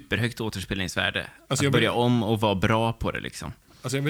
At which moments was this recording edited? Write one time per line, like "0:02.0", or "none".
none